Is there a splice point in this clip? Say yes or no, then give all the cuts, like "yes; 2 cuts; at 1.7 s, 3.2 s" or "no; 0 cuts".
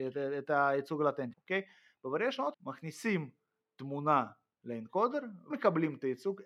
yes; 3 cuts; at 1.3 s, 2.5 s, 5.5 s